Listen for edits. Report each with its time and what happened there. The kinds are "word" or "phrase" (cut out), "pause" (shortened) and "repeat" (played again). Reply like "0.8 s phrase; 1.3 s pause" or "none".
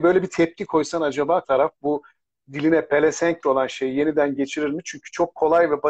1.4 s word; 3.4 s word; 4.4 s word